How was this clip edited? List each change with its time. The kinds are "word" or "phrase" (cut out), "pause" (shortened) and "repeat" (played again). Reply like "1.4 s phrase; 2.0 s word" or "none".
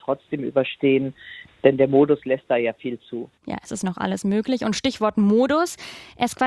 3.4 s pause